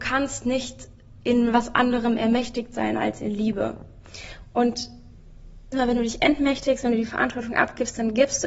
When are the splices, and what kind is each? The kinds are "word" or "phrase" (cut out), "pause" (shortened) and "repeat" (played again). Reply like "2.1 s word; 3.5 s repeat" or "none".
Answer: 5.7 s word